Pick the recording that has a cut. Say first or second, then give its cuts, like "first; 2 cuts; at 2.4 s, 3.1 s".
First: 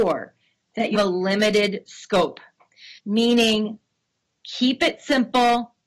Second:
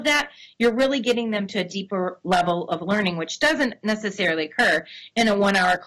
first; 2 cuts; at 0.9 s, 3.0 s